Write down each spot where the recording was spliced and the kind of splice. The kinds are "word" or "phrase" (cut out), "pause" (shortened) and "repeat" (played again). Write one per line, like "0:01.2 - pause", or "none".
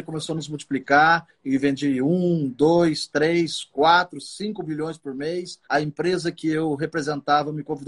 0:05.6 - pause

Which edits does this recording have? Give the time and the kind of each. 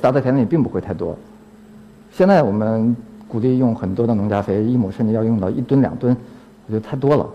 none

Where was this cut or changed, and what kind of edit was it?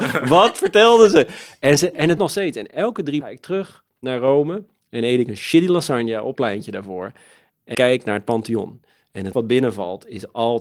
0:02.2 - word
0:03.2 - phrase
0:06.4 - word
0:07.7 - word
0:09.3 - word

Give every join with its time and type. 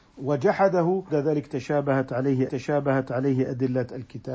0:01.1 - word
0:02.5 - repeat

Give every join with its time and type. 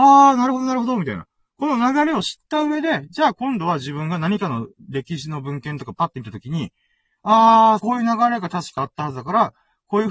0:07.8 - phrase

